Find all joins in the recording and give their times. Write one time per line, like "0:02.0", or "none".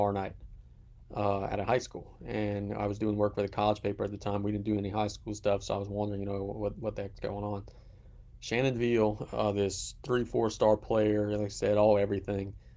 none